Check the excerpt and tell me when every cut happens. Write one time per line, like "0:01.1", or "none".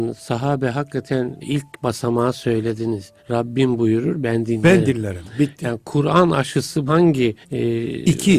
0:01.4
0:03.2
0:06.9
0:07.4